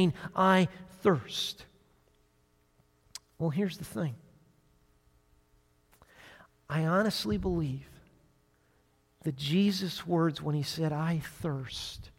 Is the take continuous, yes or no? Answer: yes